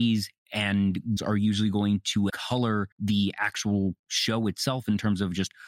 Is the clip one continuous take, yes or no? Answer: no